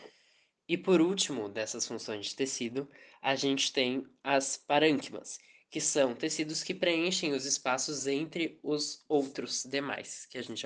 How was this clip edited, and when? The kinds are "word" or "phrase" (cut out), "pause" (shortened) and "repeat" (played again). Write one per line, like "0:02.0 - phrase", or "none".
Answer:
none